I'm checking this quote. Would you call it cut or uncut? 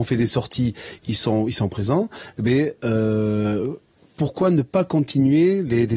uncut